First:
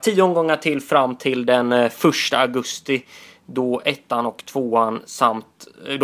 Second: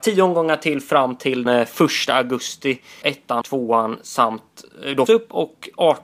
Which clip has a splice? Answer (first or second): second